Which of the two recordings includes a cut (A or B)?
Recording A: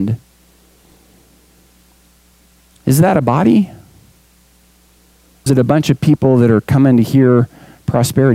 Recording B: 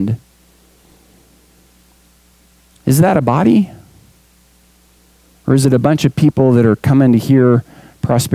A